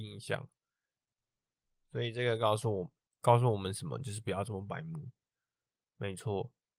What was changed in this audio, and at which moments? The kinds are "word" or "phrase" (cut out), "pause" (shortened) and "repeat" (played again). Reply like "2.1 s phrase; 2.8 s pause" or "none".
none